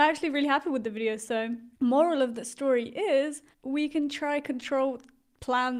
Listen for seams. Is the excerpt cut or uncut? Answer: cut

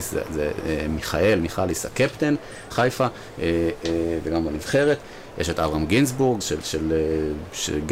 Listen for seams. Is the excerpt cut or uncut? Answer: cut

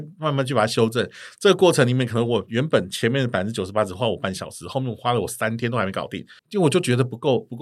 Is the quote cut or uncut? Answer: cut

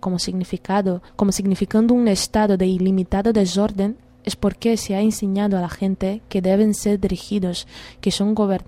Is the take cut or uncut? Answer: cut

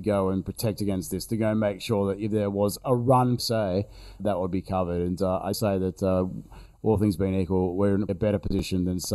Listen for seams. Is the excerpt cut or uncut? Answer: cut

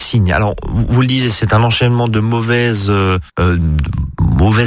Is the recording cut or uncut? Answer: cut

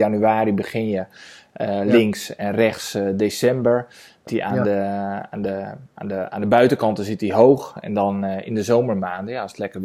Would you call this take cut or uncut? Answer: cut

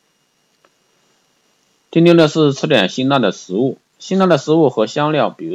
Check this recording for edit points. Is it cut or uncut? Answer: uncut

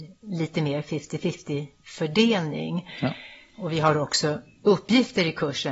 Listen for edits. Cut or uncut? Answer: uncut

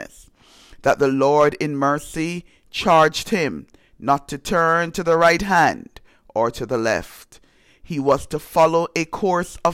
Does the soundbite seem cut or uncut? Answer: uncut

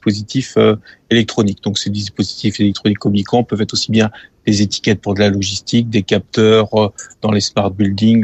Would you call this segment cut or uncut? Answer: uncut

